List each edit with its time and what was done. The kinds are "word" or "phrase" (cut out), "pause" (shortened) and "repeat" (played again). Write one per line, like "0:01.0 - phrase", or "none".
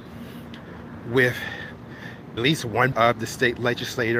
0:02.4 - word
0:02.9 - word